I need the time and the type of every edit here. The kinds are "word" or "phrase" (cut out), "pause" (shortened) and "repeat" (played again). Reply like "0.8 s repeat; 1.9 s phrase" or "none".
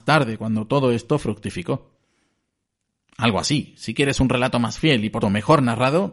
5.2 s word

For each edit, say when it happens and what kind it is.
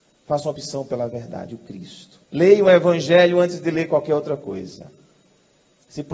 2.2 s pause

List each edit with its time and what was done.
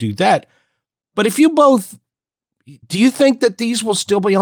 2.8 s pause

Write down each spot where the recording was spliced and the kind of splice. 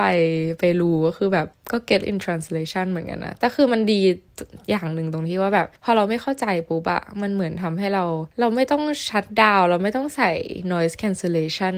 1.5 s pause; 2.0 s word; 5.8 s pause; 8.3 s pause

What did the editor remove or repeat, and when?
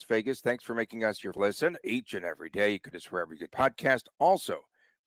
1.3 s word; 2.9 s word; 3.5 s word

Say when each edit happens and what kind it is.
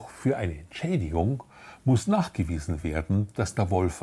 none

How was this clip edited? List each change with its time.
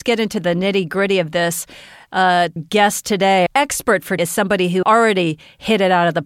2.6 s word; 3.5 s word; 4.2 s word; 4.8 s word

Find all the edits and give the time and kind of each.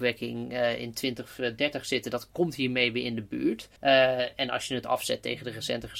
3.8 s pause

